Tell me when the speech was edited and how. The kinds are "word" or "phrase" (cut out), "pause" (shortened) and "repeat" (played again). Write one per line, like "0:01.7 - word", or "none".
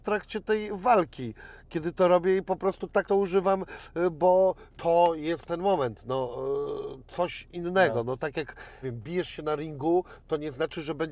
0:03.0 - word
0:04.7 - pause
0:08.8 - word